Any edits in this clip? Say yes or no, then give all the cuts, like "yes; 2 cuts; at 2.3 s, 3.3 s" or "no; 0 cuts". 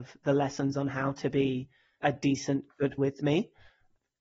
yes; 2 cuts; at 2.0 s, 3.0 s